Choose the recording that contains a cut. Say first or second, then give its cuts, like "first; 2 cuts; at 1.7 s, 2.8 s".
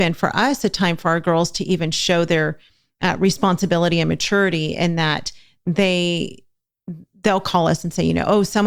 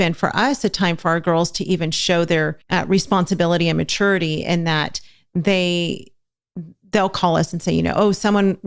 second; 1 cut; at 2.6 s